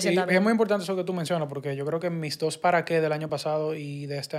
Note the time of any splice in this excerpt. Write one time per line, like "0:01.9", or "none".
none

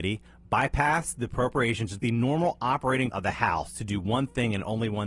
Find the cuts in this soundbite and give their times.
0:02.0
0:03.1

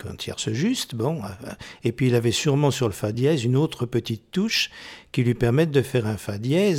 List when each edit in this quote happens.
none

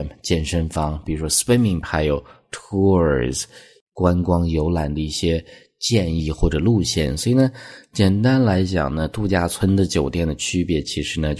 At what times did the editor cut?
0:01.8

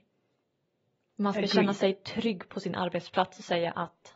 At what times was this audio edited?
none

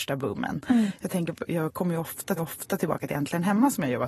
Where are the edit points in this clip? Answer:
0:02.4

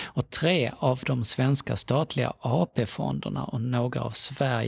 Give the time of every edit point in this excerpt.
none

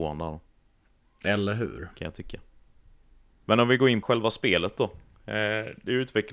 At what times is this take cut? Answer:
0:04.0

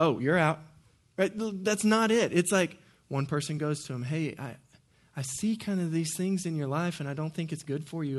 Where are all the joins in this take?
none

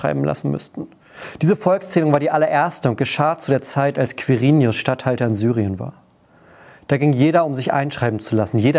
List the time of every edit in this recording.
none

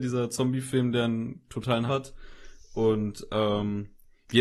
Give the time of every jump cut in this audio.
0:01.9

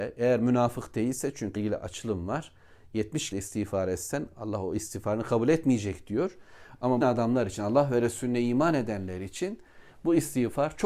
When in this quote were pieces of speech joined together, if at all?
0:01.6
0:03.3
0:07.0

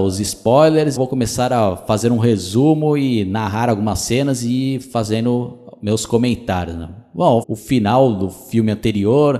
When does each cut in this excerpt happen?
0:01.0
0:07.4

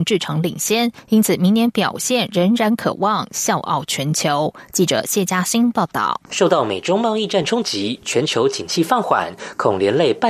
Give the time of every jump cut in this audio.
0:06.3

